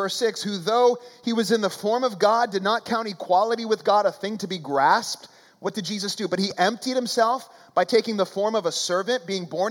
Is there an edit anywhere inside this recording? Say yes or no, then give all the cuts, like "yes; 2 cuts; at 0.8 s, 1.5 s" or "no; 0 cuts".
no; 0 cuts